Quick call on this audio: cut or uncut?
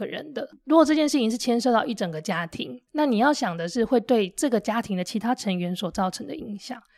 cut